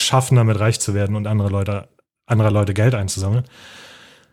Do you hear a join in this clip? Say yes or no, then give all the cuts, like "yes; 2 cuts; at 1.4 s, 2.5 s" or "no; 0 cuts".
no; 0 cuts